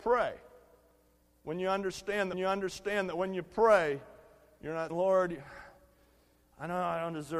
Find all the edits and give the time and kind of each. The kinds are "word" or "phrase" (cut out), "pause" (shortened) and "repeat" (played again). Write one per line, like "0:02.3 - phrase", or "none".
0:02.3 - repeat
0:04.9 - word